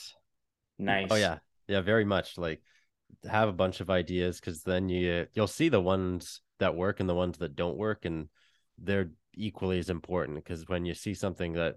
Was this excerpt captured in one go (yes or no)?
yes